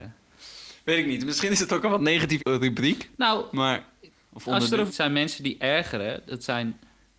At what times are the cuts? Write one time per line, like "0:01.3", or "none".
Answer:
0:02.4
0:04.9